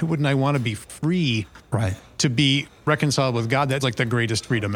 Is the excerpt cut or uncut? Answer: cut